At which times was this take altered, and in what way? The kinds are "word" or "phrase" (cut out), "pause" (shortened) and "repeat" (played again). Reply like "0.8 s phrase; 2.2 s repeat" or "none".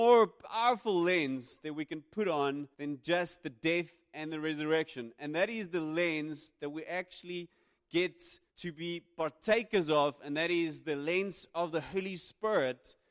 2.7 s pause; 8.5 s pause